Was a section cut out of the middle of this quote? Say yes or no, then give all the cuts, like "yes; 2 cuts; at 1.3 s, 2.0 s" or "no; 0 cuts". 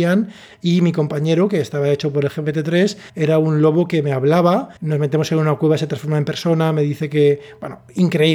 yes; 2 cuts; at 3.1 s, 4.8 s